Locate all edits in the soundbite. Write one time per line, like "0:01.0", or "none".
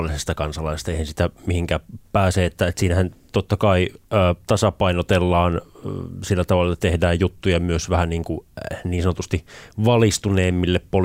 none